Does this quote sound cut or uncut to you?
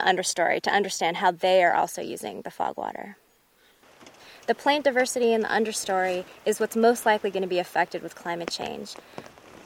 uncut